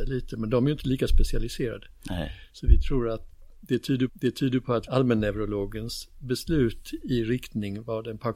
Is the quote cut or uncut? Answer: cut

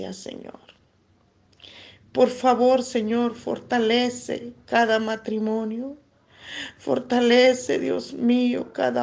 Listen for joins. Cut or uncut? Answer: uncut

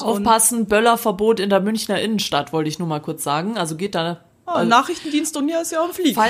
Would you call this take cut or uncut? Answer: uncut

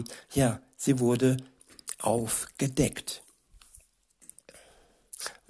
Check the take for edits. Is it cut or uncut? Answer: uncut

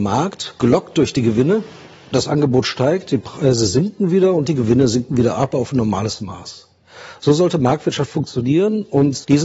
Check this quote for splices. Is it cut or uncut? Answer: uncut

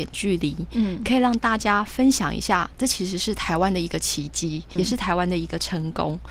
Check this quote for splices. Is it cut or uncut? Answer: cut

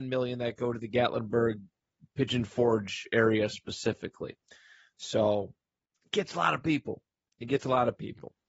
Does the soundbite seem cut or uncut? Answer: uncut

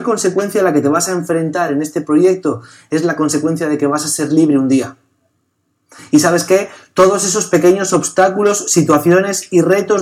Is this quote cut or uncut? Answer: uncut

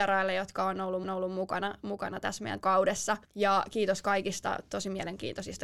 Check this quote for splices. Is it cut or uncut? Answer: cut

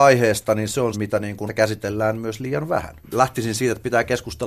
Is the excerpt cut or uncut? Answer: cut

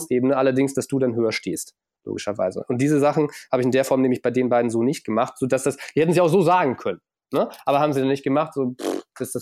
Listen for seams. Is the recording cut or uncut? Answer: uncut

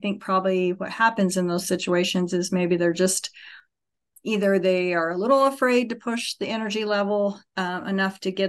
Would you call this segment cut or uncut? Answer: uncut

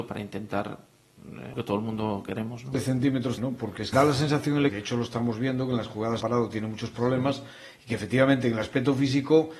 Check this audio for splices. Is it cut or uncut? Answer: cut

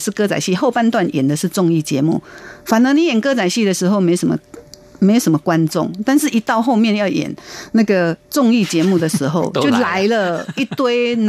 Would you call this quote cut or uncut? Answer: uncut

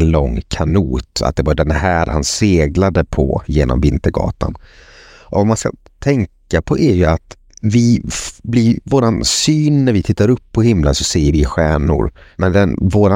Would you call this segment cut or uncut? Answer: uncut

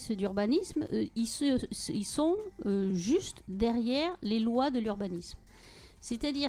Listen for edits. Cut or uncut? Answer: uncut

